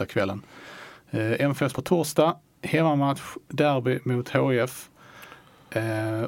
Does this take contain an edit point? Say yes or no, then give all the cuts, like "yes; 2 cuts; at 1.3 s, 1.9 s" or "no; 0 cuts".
yes; 2 cuts; at 1.7 s, 3.4 s